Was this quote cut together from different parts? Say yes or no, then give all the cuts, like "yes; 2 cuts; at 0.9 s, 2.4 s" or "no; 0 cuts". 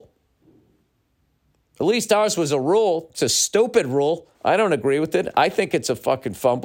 yes; 1 cut; at 4.3 s